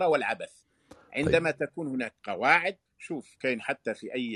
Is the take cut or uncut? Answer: cut